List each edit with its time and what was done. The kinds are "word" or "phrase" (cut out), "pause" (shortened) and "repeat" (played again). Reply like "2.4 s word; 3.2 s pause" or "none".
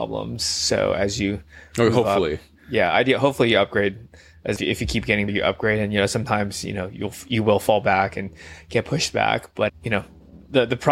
4.6 s word; 5.3 s word; 9.7 s word